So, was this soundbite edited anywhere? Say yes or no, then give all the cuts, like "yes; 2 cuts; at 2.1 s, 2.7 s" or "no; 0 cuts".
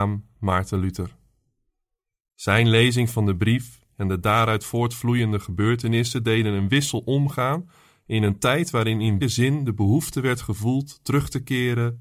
yes; 1 cut; at 9.2 s